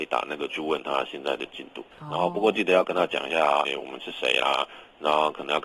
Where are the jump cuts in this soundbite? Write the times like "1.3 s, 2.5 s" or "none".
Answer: 1.9 s, 3.7 s